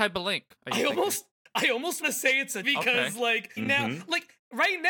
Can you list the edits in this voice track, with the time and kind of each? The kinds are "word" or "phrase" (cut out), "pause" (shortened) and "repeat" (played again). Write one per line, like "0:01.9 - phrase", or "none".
0:02.0 - word
0:02.6 - phrase
0:03.6 - word